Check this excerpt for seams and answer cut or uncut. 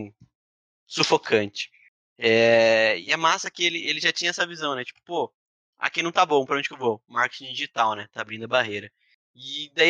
uncut